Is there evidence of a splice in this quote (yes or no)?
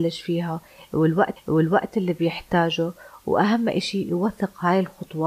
yes